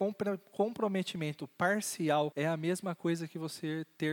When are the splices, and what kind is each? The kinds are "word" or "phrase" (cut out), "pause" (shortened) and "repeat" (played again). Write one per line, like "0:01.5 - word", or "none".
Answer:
0:02.3 - phrase